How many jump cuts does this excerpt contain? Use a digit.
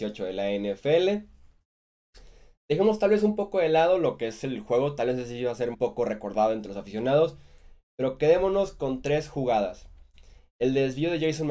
1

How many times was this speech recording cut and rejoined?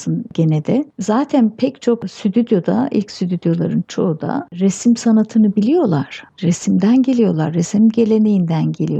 0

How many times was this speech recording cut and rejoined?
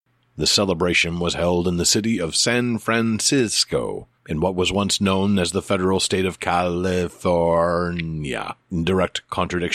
2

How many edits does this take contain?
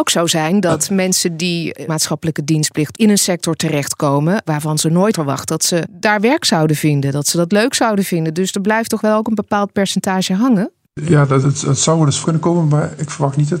6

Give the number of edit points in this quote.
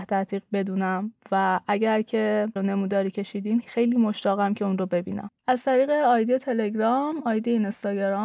3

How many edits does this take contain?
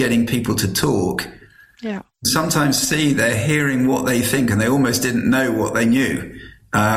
1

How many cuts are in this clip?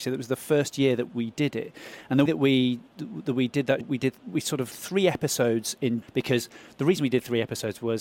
6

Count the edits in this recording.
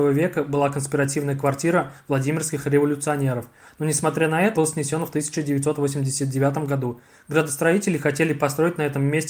1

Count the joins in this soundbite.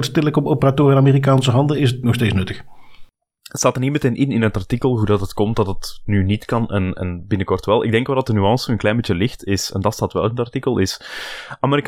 2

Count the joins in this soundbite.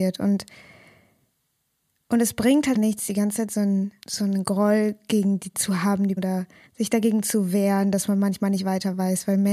5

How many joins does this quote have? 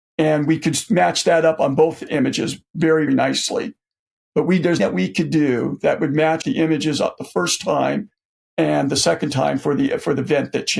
3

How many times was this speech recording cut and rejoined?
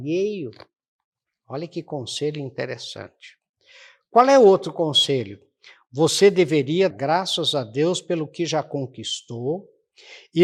1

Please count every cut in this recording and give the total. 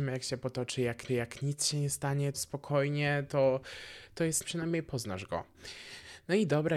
3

